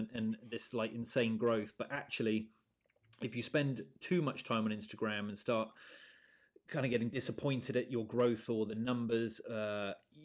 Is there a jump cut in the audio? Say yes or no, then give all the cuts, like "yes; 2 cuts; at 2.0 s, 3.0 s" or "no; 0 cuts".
no; 0 cuts